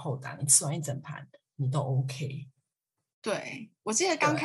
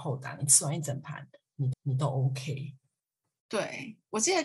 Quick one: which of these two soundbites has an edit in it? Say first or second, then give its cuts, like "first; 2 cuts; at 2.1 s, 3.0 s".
second; 1 cut; at 1.7 s